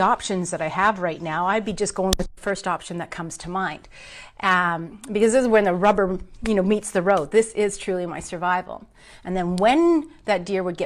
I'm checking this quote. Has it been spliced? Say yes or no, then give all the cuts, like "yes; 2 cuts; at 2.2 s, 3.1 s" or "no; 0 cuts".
no; 0 cuts